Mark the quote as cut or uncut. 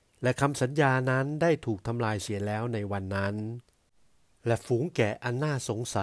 uncut